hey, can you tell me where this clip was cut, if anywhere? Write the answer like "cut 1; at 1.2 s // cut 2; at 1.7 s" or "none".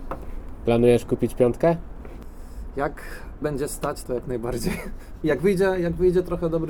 cut 1; at 3.4 s // cut 2; at 4.0 s

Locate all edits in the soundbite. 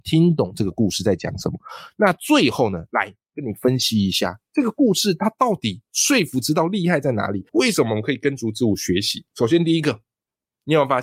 cut 1; at 7.5 s // cut 2; at 9.3 s

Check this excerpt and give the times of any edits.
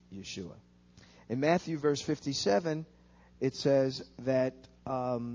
none

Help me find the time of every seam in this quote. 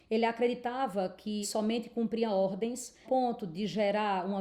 cut 1; at 1.4 s // cut 2; at 3.0 s

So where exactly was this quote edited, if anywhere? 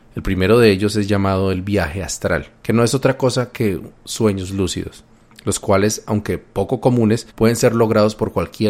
cut 1; at 2.6 s // cut 2; at 7.3 s

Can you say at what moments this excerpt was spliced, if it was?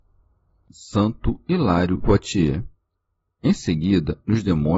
cut 1; at 2.0 s

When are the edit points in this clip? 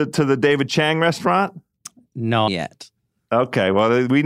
cut 1; at 2.5 s

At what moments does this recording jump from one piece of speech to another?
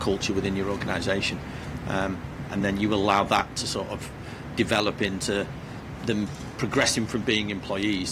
none

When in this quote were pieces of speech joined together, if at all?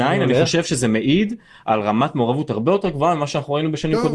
none

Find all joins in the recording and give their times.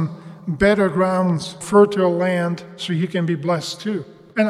cut 1; at 1.6 s

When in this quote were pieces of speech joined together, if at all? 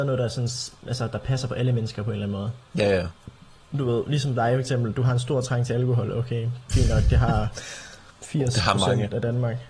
cut 1; at 2.7 s

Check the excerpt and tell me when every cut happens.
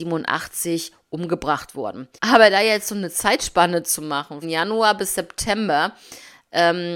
cut 1; at 2.2 s // cut 2; at 4.4 s

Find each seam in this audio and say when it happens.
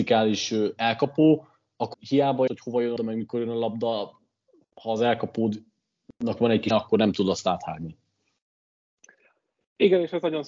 cut 1; at 1.9 s // cut 2; at 2.5 s // cut 3; at 3.0 s // cut 4; at 6.7 s

